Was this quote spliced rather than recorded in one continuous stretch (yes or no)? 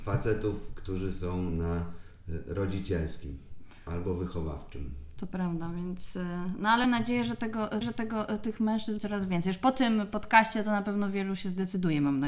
yes